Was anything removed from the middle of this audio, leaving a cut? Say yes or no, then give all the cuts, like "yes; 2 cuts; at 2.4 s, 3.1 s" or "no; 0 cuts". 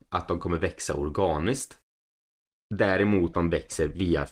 yes; 1 cut; at 3.3 s